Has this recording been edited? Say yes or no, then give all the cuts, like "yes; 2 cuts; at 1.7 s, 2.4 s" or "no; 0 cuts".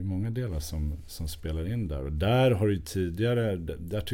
no; 0 cuts